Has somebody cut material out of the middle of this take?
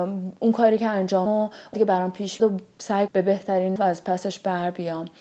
yes; 5 cuts; at 1.3 s, 1.7 s, 2.4 s, 3.1 s, 3.8 s

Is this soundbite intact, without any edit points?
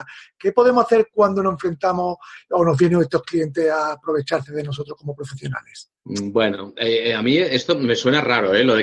no; 1 cut; at 6.0 s

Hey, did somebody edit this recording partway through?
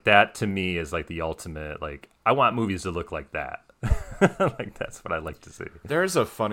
no; 0 cuts

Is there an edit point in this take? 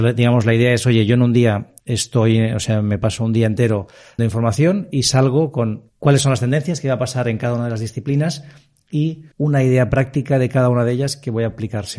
yes; 4 cuts; at 1.8 s, 4.2 s, 5.9 s, 9.3 s

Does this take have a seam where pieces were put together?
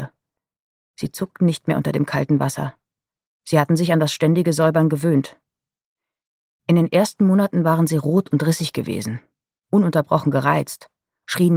no; 0 cuts

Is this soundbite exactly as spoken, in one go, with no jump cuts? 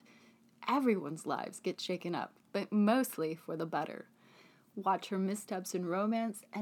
yes; 0 cuts

